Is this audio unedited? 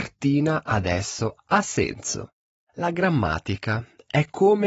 yes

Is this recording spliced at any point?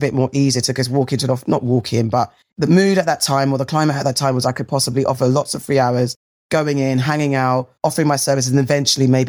yes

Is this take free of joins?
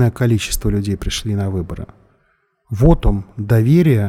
yes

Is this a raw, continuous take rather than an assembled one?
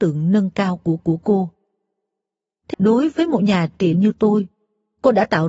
no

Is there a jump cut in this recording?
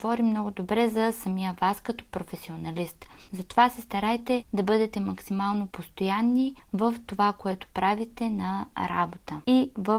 no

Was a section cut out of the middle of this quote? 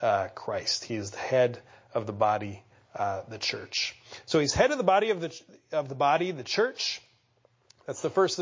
no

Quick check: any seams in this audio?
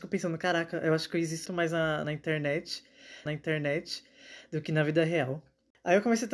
yes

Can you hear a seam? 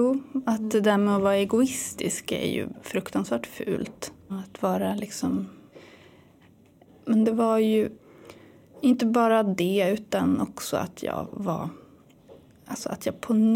no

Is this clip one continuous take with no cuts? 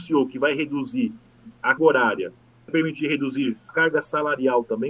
no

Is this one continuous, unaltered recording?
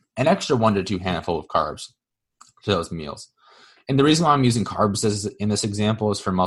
yes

